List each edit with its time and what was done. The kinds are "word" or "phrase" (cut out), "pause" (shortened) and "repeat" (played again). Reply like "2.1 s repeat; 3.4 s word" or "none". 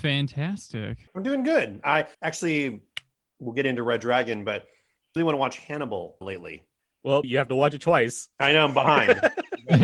1.1 s pause; 2.1 s pause; 5.2 s word; 6.2 s word; 7.2 s word; 8.3 s pause